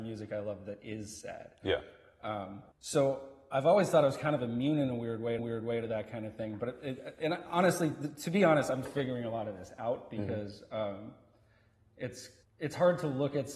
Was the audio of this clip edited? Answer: yes; 4 cuts; at 2.7 s, 5.4 s, 8.8 s, 12.4 s

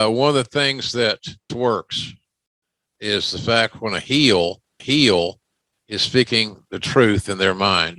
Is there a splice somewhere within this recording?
yes; 2 cuts; at 1.5 s, 4.8 s

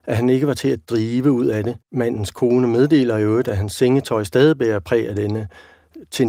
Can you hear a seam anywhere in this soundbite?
yes; 1 cut; at 1.8 s

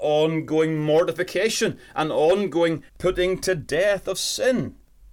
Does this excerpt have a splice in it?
yes; 1 cut; at 2.9 s

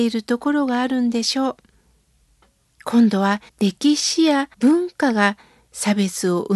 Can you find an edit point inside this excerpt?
yes; 2 cuts; at 3.5 s, 4.5 s

